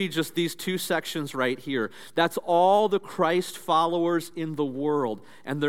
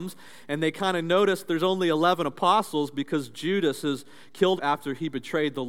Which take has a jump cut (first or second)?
second